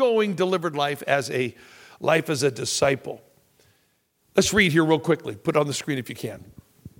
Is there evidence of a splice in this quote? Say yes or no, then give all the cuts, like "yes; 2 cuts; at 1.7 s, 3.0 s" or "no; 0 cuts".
no; 0 cuts